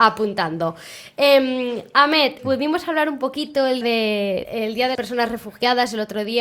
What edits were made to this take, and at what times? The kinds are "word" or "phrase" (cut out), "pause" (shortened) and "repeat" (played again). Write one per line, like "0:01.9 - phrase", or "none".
0:02.4 - word
0:03.8 - word
0:04.4 - word
0:04.9 - word